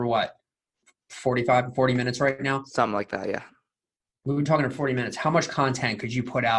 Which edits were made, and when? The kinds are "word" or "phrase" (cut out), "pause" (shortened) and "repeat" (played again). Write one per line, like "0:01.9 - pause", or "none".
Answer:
none